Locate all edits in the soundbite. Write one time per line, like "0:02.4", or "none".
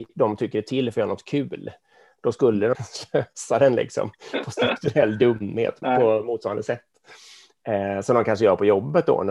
0:02.7
0:05.8